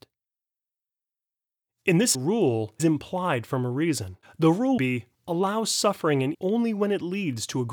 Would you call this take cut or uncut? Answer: cut